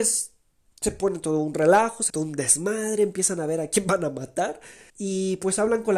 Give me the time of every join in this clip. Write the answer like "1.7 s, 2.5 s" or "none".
2.1 s, 4.9 s